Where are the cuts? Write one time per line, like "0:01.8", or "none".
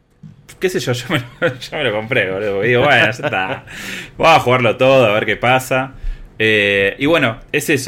none

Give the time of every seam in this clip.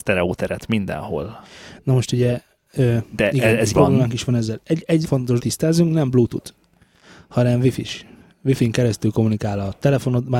0:03.7
0:05.0
0:05.4

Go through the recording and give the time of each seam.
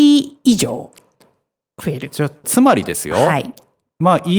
0:02.4

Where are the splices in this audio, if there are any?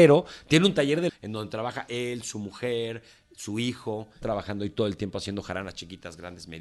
0:01.1
0:04.2

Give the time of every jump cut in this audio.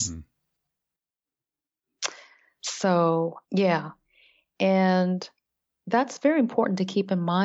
0:03.4

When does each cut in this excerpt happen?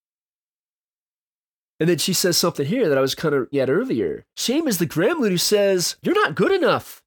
0:03.5
0:04.3
0:06.0

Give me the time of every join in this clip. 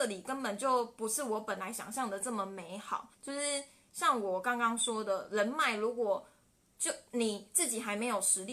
0:03.1

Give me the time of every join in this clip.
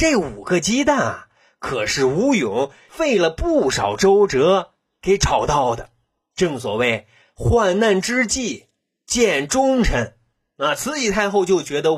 none

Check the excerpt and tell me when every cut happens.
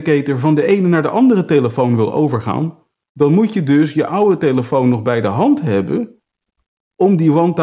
none

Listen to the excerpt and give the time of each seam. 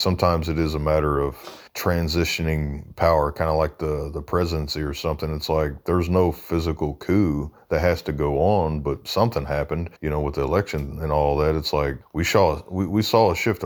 0:01.7
0:10.0
0:12.0

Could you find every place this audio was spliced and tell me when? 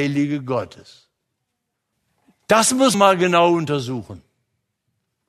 0:02.9

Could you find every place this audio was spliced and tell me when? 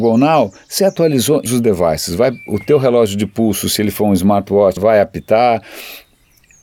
0:01.5
0:04.8

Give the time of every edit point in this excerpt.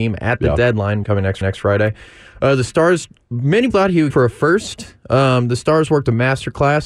0:01.0
0:01.4
0:03.3
0:03.7
0:04.1

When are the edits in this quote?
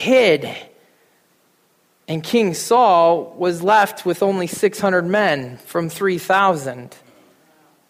none

